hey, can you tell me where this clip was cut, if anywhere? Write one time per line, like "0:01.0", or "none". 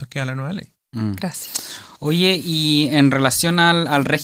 0:02.0